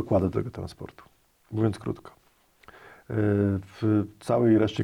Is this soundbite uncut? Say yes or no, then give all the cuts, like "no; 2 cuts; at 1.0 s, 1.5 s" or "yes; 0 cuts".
yes; 0 cuts